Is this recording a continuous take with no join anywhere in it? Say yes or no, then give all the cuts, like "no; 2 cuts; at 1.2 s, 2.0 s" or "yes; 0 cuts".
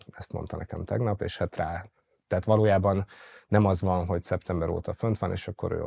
no; 1 cut; at 1.5 s